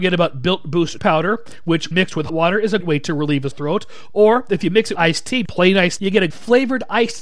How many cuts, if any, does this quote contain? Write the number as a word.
nine